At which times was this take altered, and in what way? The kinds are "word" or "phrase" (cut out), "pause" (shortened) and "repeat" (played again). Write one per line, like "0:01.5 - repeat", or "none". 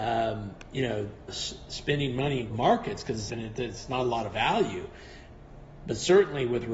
0:01.3 - word
0:02.5 - word
0:03.3 - word